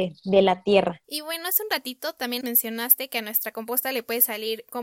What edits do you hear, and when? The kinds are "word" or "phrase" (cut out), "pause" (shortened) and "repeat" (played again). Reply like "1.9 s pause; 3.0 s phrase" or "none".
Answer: 1.0 s pause; 2.4 s word